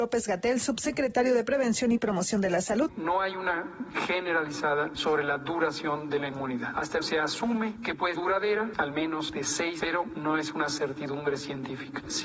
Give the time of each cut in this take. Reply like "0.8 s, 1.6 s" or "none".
3.9 s, 7.0 s, 8.2 s, 9.8 s